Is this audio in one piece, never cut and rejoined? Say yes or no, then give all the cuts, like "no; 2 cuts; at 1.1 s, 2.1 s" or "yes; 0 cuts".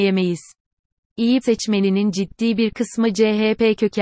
no; 1 cut; at 1.4 s